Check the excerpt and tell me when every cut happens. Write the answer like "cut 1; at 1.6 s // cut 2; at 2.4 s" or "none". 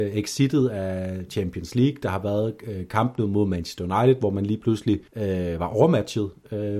cut 1; at 5.1 s

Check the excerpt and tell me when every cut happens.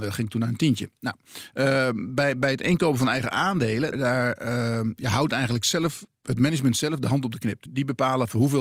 cut 1; at 3.9 s // cut 2; at 7.7 s

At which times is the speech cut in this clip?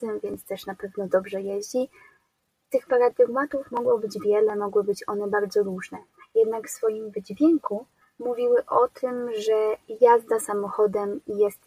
none

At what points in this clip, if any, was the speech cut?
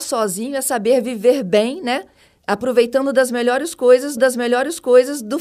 cut 1; at 4.2 s

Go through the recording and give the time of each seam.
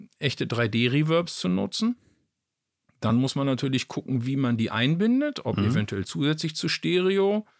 none

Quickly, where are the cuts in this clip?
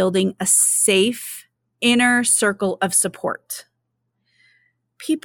none

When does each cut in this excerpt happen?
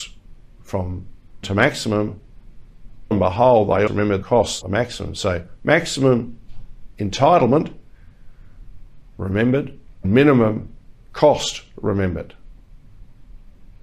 cut 1; at 1.4 s // cut 2; at 3.1 s // cut 3; at 3.9 s // cut 4; at 4.2 s // cut 5; at 4.6 s // cut 6; at 10.0 s

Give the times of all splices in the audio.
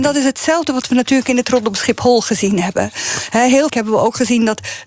cut 1; at 1.4 s // cut 2; at 3.7 s

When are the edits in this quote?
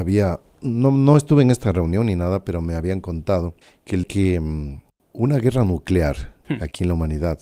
cut 1; at 3.6 s // cut 2; at 4.0 s // cut 3; at 5.0 s

